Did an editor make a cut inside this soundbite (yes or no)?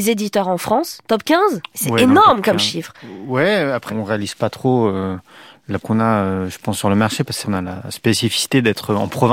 yes